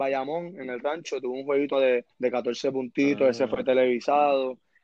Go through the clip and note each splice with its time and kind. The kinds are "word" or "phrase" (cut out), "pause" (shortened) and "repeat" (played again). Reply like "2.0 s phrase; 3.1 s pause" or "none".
1.7 s word; 2.1 s pause